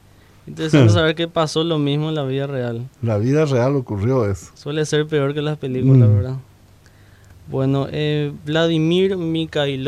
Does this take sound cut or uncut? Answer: uncut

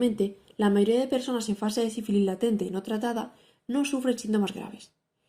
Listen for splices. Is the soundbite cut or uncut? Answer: uncut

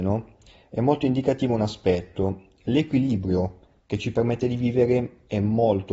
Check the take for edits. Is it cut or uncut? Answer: uncut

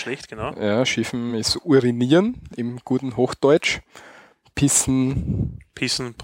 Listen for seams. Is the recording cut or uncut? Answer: uncut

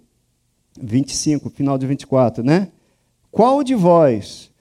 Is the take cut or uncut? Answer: uncut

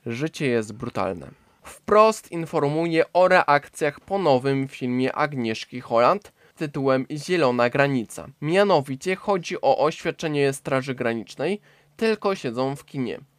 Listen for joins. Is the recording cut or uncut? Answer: cut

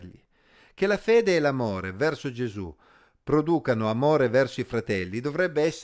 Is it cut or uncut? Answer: uncut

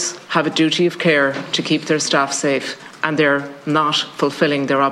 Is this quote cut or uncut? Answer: uncut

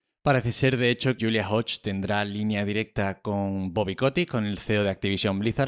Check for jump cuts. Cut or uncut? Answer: cut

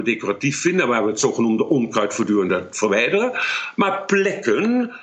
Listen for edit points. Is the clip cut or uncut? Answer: uncut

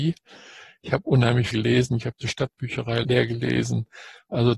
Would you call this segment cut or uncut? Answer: cut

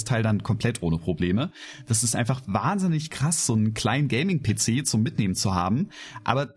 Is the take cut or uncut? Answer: uncut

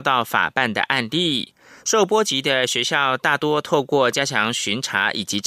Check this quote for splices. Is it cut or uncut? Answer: uncut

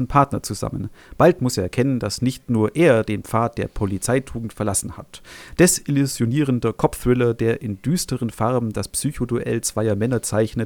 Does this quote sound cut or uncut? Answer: uncut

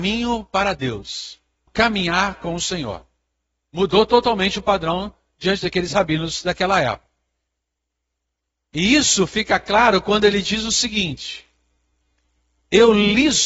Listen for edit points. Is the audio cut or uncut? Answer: cut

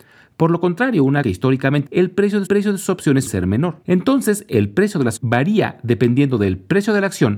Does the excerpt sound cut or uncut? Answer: cut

